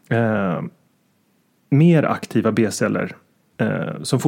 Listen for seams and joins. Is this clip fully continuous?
yes; 0 cuts

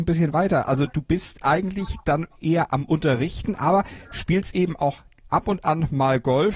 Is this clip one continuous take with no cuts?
yes; 0 cuts

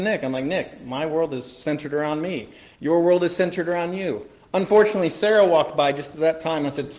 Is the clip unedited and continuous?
yes; 0 cuts

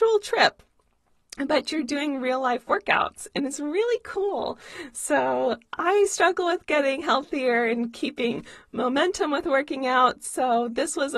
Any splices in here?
no; 0 cuts

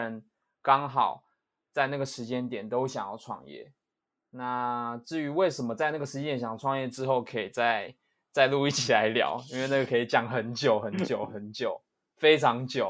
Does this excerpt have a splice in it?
no; 0 cuts

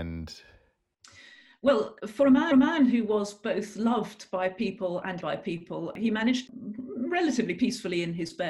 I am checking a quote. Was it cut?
yes; 4 cuts; at 2.0 s, 2.5 s, 5.2 s, 6.5 s

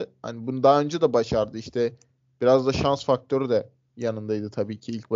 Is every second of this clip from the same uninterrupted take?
yes; 0 cuts

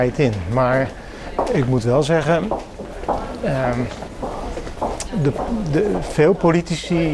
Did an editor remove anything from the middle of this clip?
no; 0 cuts

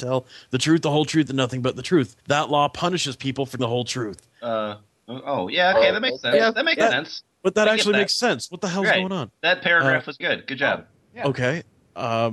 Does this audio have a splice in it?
yes; 5 cuts; at 2.2 s, 3.6 s, 4.3 s, 10.2 s, 11.0 s

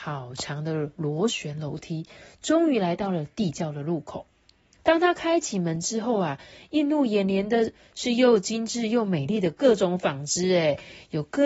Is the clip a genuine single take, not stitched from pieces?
yes; 0 cuts

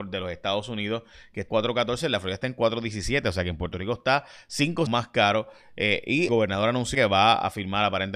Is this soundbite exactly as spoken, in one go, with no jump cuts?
no; 4 cuts; at 1.5 s, 4.9 s, 6.3 s, 6.9 s

